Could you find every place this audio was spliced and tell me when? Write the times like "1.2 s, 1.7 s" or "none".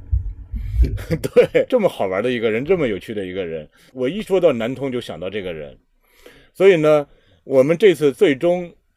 none